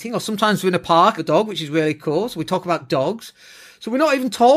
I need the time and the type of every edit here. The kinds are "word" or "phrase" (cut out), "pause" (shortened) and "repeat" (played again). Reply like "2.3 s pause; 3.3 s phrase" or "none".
1.2 s phrase